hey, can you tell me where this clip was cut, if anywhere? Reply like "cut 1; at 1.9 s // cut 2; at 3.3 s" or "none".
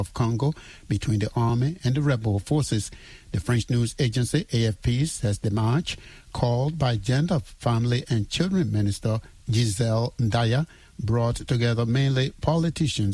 none